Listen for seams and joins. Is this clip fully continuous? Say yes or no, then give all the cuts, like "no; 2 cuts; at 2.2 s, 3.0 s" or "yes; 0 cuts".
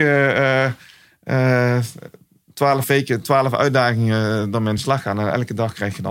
yes; 0 cuts